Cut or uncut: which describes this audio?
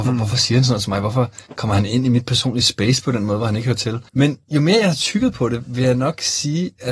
cut